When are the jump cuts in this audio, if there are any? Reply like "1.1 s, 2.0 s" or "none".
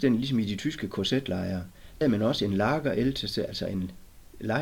2.0 s